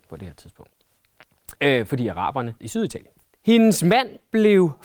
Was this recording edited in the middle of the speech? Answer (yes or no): yes